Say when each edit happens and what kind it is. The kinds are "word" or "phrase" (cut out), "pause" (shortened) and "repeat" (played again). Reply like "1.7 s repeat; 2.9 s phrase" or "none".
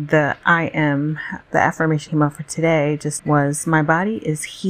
1.4 s word; 2.1 s word; 3.2 s word